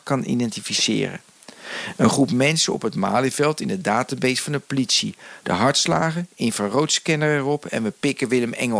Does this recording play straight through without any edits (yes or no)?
yes